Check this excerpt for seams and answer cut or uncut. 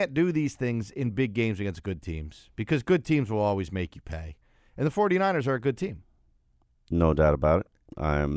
uncut